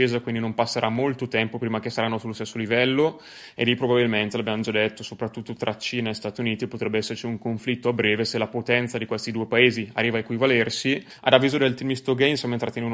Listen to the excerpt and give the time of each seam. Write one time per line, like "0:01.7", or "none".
none